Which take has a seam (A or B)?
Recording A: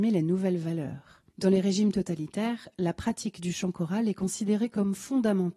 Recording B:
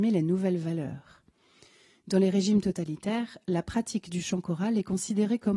A